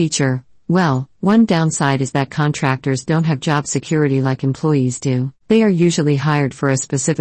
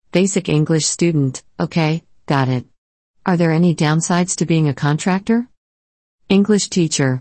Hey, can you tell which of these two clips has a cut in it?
first; 1 cut; at 5.4 s

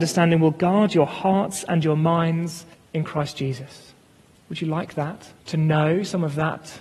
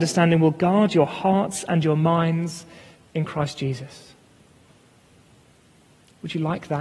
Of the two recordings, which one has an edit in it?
first; 3 cuts; at 2.7 s, 4.4 s, 5.4 s

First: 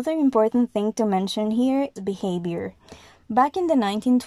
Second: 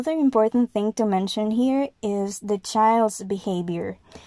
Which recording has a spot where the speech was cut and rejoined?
first; 1 cut; at 2.0 s

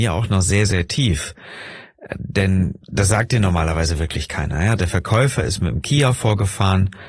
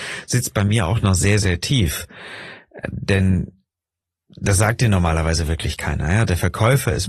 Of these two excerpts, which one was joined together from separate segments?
first; 1 cut; at 2.8 s

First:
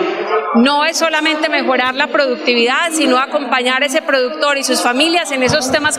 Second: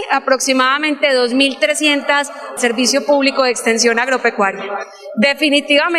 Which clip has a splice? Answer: second; 1 cut; at 2.6 s

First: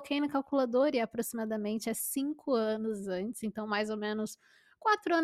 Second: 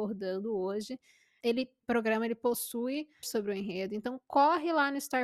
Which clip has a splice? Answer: second; 3 cuts; at 1.4 s, 1.8 s, 3.2 s

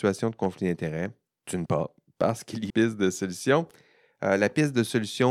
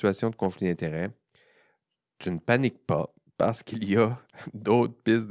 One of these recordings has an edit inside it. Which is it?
first; 3 cuts; at 1.3 s, 1.7 s, 2.7 s

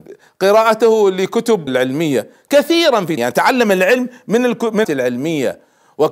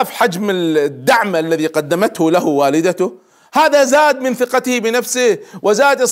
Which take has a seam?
first; 3 cuts; at 1.7 s, 3.2 s, 4.8 s

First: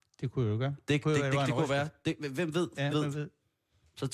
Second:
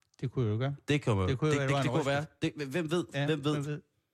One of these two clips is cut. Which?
first; 2 cuts; at 1.0 s, 2.9 s

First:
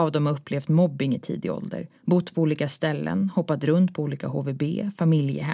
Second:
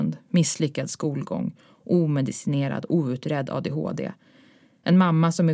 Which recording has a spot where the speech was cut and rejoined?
first; 1 cut; at 2.0 s

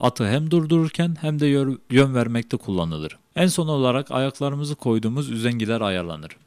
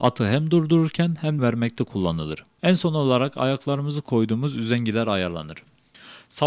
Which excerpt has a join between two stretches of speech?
second; 1 cut; at 1.4 s

